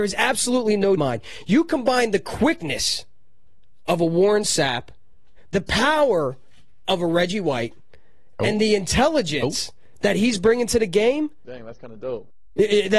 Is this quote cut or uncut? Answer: cut